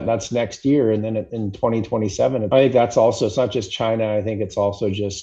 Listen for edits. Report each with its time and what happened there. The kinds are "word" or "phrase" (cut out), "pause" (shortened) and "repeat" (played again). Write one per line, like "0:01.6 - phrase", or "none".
0:02.5 - phrase